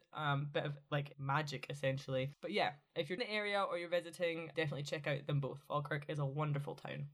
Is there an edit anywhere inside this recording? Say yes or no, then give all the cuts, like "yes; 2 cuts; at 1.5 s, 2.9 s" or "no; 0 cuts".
yes; 3 cuts; at 1.1 s, 3.2 s, 4.5 s